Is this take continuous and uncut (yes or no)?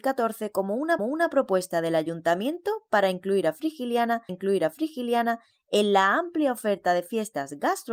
no